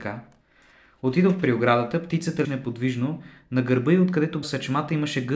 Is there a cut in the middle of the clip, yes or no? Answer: yes